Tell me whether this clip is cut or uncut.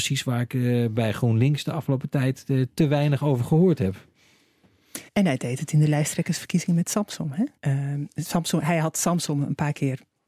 cut